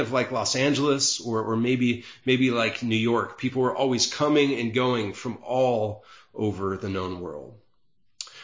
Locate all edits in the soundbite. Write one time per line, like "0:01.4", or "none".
none